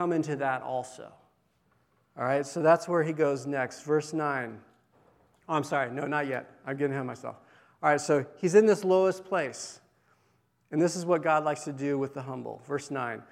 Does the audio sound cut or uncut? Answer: uncut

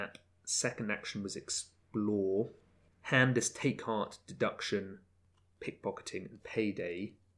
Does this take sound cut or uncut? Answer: uncut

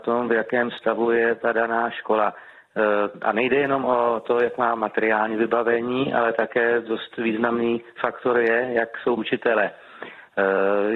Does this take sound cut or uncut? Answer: cut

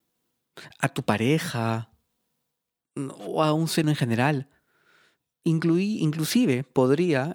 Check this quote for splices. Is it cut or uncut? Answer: cut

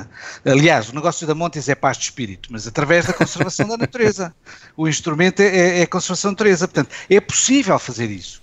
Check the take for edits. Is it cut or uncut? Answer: uncut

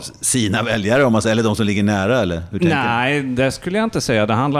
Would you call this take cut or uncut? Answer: uncut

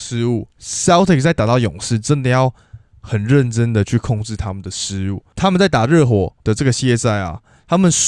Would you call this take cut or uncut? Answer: cut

